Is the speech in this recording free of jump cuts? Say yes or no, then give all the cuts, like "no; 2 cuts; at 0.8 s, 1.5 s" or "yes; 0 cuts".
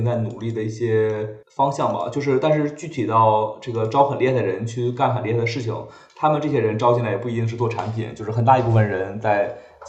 no; 1 cut; at 1.4 s